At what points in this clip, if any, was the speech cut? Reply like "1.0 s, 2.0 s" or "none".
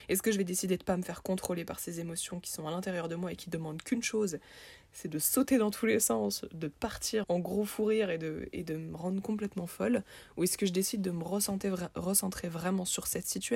7.2 s